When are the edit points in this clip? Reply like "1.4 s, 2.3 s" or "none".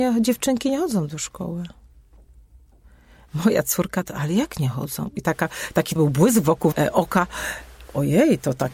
6.0 s, 6.7 s